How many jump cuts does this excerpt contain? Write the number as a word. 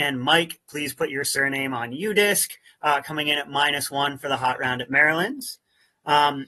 zero